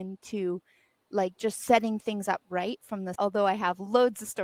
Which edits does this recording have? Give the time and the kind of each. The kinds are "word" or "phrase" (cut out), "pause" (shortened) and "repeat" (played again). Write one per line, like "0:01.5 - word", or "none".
0:03.1 - word